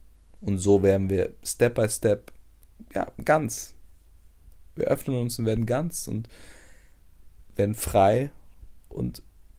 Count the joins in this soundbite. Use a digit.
0